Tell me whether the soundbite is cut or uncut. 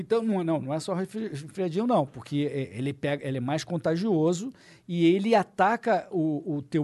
uncut